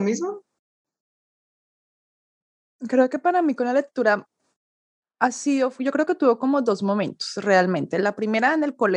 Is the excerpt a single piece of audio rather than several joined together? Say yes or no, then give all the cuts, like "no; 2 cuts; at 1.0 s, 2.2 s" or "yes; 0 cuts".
yes; 0 cuts